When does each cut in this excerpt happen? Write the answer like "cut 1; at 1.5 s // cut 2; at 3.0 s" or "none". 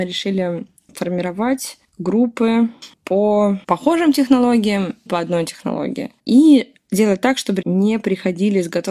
cut 1; at 3.6 s // cut 2; at 5.1 s // cut 3; at 6.2 s // cut 4; at 7.6 s